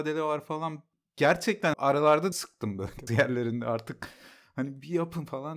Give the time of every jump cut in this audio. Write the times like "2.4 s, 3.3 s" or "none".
1.7 s, 2.3 s, 3.1 s